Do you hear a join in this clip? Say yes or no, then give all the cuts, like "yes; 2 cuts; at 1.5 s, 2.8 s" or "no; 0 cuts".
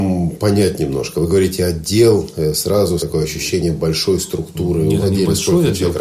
yes; 2 cuts; at 3.0 s, 5.0 s